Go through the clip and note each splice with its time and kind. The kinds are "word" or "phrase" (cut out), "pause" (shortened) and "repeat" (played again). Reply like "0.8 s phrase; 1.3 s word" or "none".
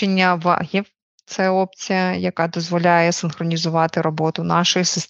none